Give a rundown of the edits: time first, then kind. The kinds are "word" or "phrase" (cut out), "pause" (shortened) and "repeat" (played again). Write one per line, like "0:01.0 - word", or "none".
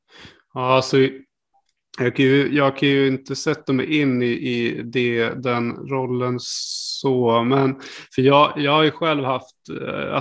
none